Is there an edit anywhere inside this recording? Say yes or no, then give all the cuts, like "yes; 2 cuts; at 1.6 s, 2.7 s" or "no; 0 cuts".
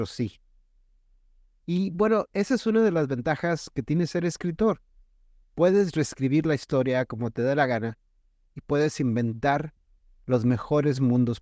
no; 0 cuts